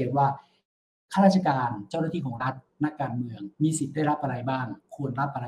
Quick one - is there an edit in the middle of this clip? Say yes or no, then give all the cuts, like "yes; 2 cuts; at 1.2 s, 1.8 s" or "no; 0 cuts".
yes; 1 cut; at 3.5 s